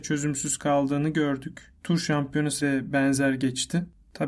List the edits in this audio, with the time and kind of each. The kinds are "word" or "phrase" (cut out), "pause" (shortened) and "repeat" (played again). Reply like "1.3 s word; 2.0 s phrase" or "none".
1.8 s pause; 2.6 s word